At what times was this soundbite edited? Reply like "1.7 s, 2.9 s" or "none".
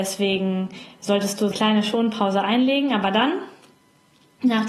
1.5 s